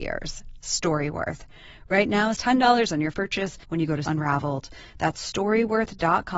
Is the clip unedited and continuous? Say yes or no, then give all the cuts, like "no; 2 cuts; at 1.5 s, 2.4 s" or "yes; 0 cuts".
no; 4 cuts; at 2.4 s, 3.1 s, 3.6 s, 4.1 s